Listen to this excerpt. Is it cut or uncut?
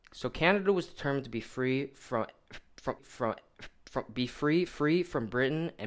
cut